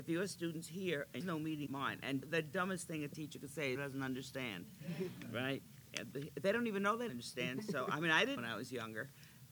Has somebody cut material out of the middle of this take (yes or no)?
yes